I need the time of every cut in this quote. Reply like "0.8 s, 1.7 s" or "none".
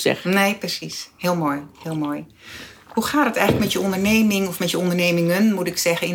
none